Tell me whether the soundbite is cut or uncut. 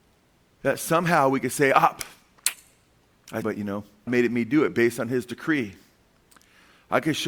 cut